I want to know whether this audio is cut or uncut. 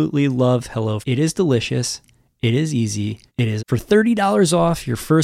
cut